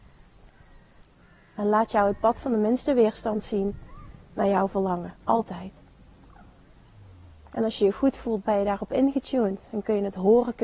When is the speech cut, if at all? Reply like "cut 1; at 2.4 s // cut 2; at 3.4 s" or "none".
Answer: none